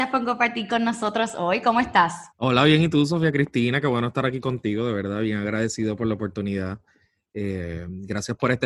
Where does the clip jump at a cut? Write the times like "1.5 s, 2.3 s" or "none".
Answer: 2.3 s